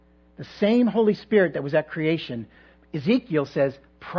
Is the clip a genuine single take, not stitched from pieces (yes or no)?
yes